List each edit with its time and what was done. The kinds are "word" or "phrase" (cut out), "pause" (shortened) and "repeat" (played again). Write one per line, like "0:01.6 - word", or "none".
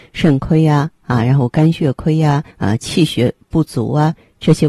0:02.5 - pause